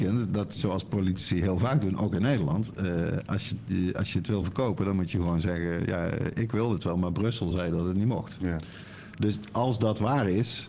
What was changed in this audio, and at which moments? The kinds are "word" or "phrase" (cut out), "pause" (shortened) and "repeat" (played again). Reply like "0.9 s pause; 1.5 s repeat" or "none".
none